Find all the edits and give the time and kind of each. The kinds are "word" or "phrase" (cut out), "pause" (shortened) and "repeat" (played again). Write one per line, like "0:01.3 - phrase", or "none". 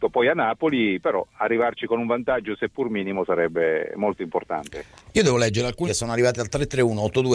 0:05.9 - word